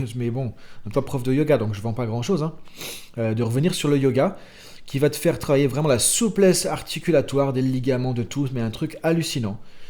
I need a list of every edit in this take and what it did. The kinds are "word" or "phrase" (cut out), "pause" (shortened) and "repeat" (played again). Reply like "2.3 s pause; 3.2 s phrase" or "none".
0.9 s phrase